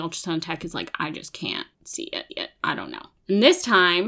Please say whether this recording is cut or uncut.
cut